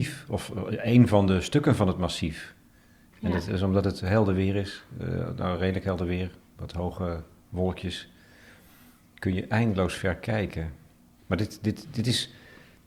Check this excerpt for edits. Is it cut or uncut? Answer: uncut